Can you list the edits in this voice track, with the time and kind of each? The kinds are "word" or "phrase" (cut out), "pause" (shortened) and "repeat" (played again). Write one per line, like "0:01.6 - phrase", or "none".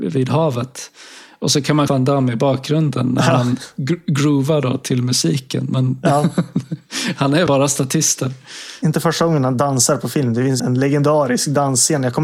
0:01.9 - word
0:07.5 - word
0:10.6 - word